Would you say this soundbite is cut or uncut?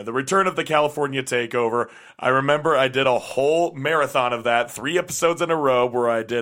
uncut